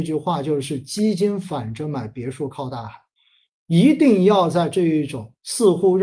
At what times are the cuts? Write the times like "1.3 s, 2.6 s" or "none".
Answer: none